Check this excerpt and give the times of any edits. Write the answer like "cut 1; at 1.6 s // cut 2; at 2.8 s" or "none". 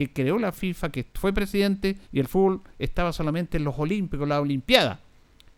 cut 1; at 2.0 s